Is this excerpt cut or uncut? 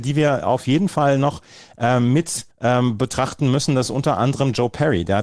cut